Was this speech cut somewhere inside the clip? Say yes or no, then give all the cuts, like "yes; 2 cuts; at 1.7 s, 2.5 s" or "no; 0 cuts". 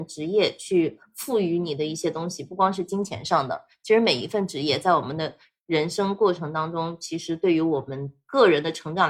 no; 0 cuts